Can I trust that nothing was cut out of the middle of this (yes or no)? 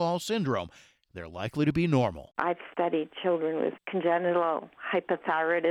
yes